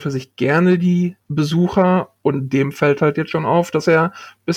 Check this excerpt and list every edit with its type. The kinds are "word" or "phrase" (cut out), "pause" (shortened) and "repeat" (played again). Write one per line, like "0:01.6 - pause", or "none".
0:03.0 - phrase